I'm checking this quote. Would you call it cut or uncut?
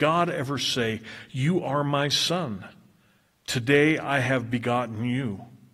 uncut